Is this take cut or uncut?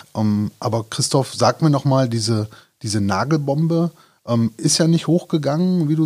uncut